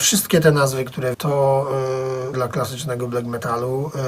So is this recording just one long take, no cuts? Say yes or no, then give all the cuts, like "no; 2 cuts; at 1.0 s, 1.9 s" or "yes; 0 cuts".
no; 2 cuts; at 1.1 s, 2.3 s